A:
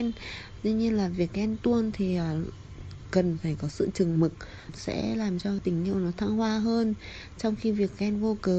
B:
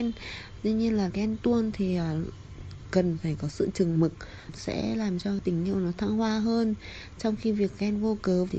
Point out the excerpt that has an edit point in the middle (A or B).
B